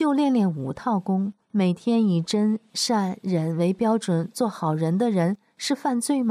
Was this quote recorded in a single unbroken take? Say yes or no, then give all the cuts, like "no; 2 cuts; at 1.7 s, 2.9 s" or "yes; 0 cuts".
no; 1 cut; at 1.4 s